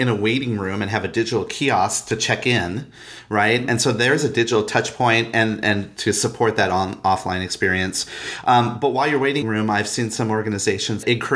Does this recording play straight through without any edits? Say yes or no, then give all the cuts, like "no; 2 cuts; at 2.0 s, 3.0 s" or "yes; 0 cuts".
no; 1 cut; at 9.4 s